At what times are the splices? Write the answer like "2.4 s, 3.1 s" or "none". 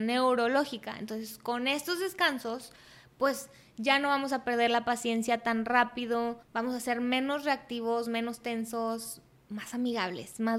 6.4 s